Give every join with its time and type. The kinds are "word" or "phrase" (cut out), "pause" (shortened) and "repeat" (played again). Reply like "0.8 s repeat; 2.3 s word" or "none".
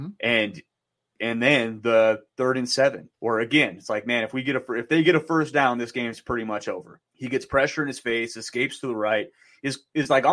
3.1 s pause; 7.0 s pause